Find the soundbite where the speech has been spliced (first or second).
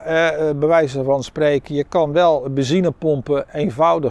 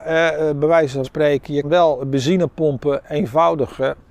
second